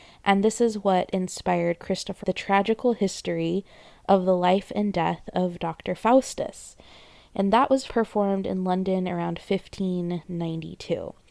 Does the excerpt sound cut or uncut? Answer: cut